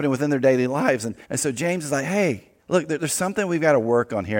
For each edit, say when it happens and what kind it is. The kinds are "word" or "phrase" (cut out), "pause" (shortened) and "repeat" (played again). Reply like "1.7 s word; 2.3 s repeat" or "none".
1.2 s pause; 2.6 s pause